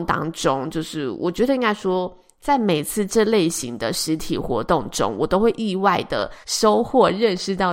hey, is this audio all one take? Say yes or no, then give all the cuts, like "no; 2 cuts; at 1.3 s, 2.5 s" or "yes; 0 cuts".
no; 1 cut; at 6.4 s